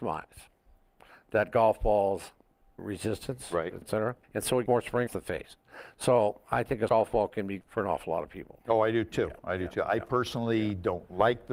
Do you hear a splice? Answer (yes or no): yes